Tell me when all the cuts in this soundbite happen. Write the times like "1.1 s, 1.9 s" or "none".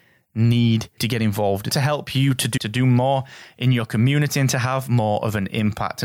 1.0 s, 1.7 s, 2.6 s